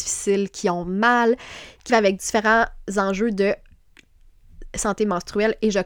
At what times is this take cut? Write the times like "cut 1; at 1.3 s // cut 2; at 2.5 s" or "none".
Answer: cut 1; at 1.9 s